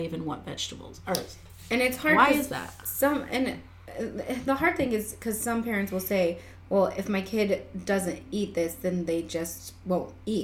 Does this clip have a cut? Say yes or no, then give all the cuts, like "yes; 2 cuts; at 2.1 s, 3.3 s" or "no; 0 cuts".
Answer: no; 0 cuts